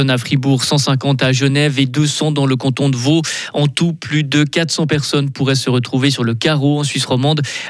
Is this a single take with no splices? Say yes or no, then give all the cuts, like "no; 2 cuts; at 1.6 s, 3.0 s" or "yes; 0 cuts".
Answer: yes; 0 cuts